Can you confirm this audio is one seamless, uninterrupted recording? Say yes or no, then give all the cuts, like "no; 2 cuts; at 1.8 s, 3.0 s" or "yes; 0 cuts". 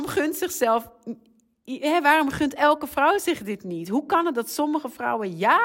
yes; 0 cuts